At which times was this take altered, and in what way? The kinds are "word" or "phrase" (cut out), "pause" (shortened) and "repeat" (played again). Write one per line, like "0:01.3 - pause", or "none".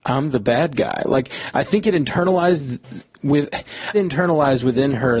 0:03.9 - phrase